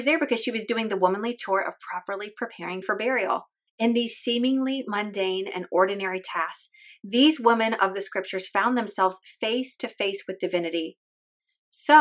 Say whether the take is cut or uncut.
cut